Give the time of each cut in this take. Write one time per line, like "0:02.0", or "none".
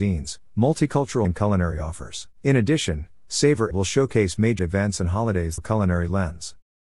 0:01.2
0:02.3
0:03.7
0:04.6
0:05.6